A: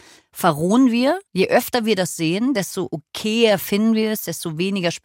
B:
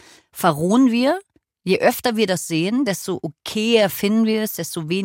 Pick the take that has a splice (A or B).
A